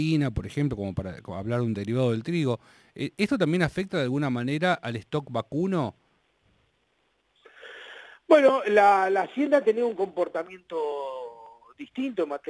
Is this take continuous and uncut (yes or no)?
yes